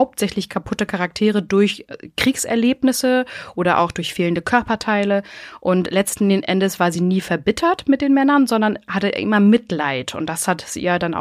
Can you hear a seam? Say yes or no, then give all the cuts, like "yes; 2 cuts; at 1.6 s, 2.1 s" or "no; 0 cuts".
no; 0 cuts